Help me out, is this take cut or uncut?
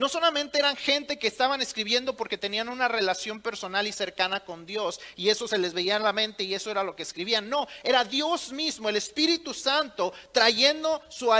uncut